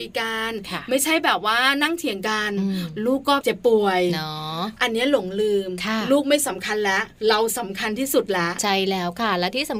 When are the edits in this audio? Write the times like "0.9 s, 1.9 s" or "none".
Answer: 7.2 s